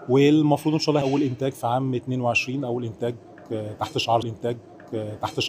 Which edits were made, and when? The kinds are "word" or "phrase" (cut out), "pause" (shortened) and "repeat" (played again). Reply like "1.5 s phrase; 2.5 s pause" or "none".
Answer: 1.0 s word; 4.2 s repeat